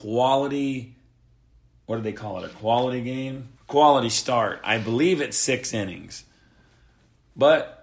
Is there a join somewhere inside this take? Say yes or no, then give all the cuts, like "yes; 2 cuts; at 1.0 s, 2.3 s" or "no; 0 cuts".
yes; 1 cut; at 3.5 s